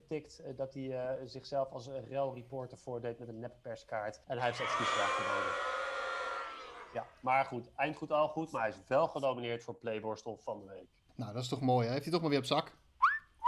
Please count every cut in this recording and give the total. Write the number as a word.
two